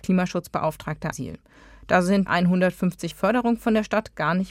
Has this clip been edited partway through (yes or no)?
yes